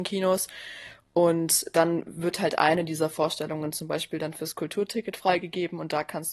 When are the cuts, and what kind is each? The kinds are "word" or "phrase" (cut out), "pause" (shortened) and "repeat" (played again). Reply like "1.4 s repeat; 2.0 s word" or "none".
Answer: none